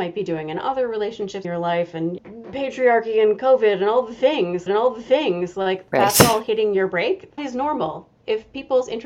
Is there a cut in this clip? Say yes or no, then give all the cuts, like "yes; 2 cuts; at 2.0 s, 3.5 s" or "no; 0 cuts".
yes; 4 cuts; at 1.4 s, 2.2 s, 4.7 s, 7.4 s